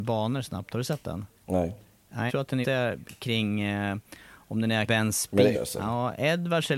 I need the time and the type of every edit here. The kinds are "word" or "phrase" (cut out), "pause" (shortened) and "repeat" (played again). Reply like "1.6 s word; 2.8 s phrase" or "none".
1.3 s pause; 2.3 s word; 2.6 s word; 4.9 s word; 5.5 s word